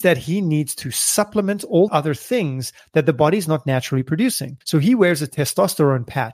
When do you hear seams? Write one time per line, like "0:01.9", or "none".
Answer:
0:01.9
0:04.6